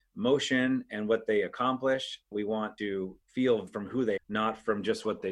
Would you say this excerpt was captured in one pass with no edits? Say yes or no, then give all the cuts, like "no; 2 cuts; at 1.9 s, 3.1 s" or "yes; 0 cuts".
no; 4 cuts; at 2.3 s, 2.8 s, 3.7 s, 4.2 s